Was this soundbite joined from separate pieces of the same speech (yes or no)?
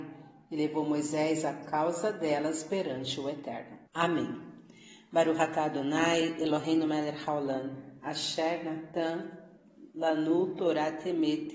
yes